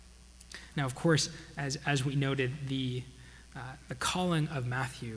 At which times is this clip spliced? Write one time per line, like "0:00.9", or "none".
none